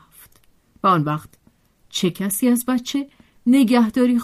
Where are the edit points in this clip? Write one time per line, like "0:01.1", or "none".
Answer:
none